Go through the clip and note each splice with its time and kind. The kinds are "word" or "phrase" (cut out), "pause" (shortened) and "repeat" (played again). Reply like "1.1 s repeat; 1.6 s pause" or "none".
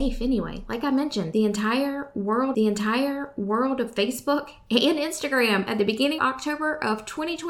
2.5 s repeat; 6.2 s word